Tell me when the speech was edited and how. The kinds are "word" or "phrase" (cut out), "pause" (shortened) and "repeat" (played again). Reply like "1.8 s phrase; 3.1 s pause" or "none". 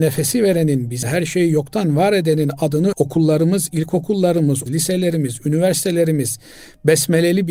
1.0 s word; 2.9 s word; 4.7 s word